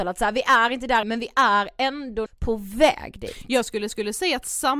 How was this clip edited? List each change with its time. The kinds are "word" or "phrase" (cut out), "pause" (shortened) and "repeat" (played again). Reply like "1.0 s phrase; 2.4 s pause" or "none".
1.0 s word; 2.3 s word; 3.9 s repeat